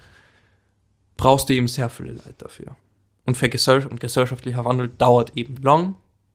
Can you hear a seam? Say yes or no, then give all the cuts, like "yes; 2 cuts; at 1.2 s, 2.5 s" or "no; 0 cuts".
no; 0 cuts